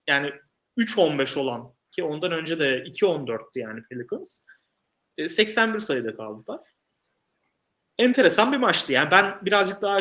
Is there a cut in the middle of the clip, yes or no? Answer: no